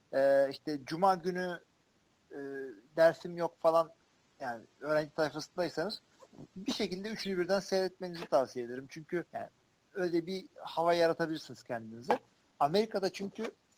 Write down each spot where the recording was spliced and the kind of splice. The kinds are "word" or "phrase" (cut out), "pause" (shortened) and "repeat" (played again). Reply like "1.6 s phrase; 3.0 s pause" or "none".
9.3 s pause